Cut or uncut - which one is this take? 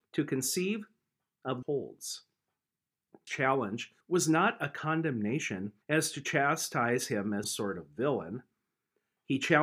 cut